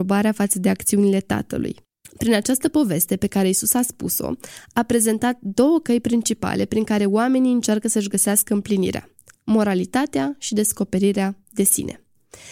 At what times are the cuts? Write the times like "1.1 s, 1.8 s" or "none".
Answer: none